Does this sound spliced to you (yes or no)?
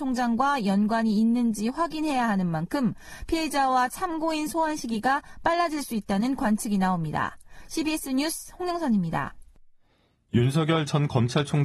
no